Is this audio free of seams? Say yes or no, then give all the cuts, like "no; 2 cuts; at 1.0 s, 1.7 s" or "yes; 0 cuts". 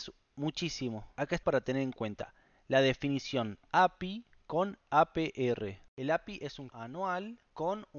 no; 2 cuts; at 1.4 s, 6.7 s